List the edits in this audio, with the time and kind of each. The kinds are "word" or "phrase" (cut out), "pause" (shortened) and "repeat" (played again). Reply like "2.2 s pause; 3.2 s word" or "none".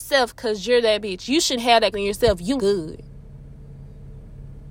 1.6 s word; 1.9 s word; 2.6 s word